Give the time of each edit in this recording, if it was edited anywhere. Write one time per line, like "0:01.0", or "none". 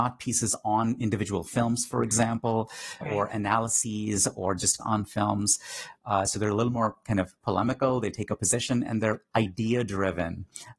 0:03.0
0:04.8

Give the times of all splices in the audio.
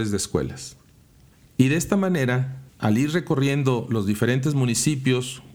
0:01.3
0:02.7

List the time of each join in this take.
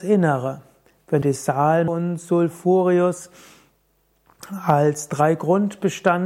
0:01.2
0:01.9

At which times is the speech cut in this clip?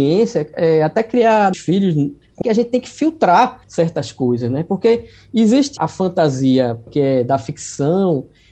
0:01.5
0:02.4
0:03.6
0:05.8
0:06.9

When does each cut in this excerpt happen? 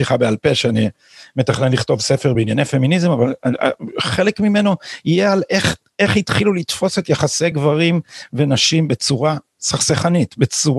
none

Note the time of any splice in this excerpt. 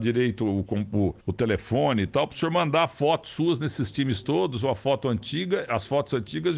0:01.2

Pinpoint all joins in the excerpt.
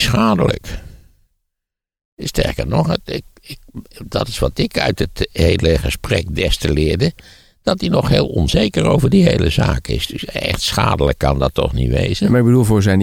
none

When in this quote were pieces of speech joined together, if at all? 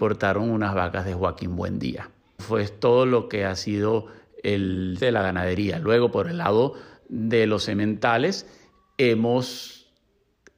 0:02.4
0:05.0

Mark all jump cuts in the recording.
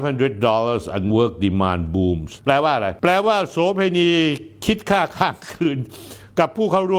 0:01.1

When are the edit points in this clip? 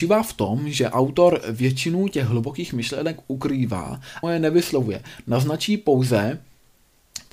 0:04.2

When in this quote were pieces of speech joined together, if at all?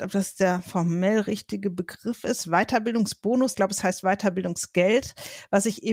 0:03.5

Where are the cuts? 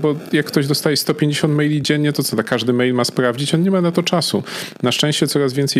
none

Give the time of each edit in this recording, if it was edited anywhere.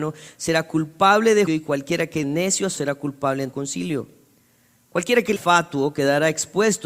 0:01.5
0:02.2
0:02.8
0:03.5
0:05.4

